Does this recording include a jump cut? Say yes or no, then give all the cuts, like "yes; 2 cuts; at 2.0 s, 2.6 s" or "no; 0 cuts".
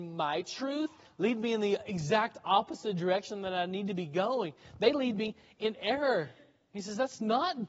no; 0 cuts